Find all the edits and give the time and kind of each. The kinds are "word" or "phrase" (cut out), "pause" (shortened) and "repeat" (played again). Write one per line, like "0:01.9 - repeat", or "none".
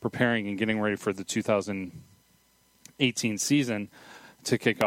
none